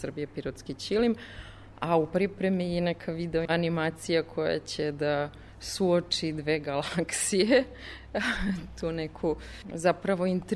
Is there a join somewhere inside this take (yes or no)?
no